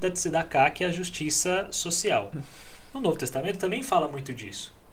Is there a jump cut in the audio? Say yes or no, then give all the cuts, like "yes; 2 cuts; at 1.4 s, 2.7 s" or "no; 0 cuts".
no; 0 cuts